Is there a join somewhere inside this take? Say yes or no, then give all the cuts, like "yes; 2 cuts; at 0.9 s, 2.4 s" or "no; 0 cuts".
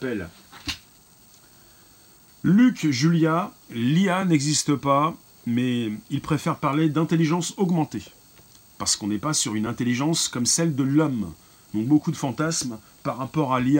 no; 0 cuts